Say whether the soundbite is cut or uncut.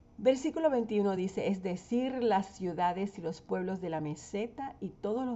uncut